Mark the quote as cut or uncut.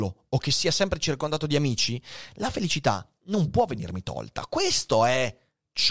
uncut